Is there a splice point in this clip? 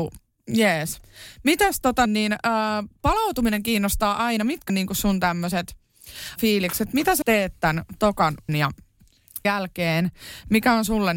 yes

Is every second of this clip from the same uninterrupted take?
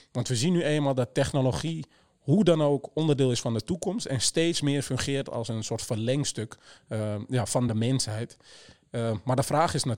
yes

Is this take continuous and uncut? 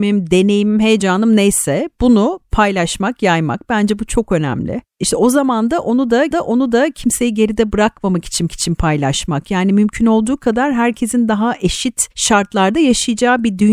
no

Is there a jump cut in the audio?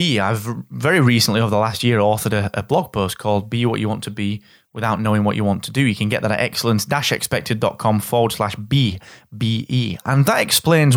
no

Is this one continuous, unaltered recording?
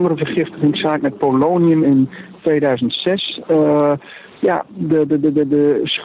yes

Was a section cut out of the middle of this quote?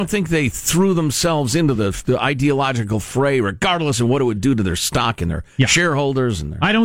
no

